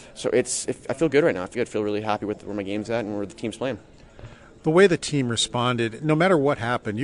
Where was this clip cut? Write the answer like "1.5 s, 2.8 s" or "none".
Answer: 1.5 s